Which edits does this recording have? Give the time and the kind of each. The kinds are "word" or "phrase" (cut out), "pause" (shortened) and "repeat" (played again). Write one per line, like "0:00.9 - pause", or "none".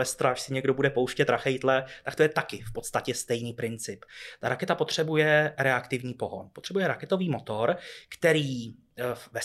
none